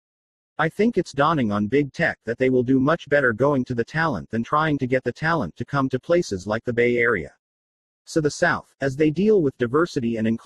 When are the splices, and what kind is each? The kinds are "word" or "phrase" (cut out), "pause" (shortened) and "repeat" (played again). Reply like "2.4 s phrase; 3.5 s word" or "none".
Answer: none